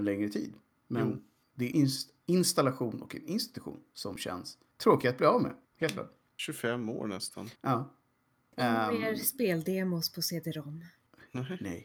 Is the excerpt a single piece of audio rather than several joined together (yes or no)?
no